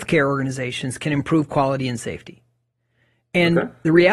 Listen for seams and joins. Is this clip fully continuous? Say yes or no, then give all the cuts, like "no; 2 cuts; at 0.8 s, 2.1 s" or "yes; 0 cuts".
yes; 0 cuts